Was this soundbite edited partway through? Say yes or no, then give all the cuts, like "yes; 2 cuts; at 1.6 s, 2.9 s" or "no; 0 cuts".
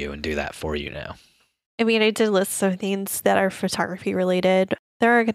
no; 0 cuts